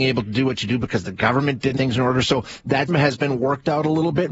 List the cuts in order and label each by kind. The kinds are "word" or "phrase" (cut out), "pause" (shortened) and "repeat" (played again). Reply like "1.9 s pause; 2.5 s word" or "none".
1.8 s word; 2.9 s word